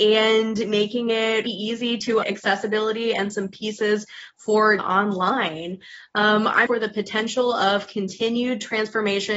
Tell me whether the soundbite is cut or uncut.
cut